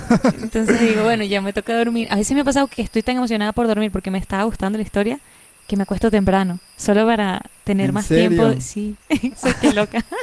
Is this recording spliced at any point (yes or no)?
no